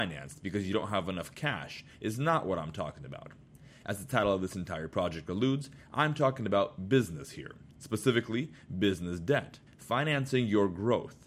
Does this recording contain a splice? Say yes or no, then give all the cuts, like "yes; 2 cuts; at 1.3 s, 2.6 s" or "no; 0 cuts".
yes; 1 cut; at 9.7 s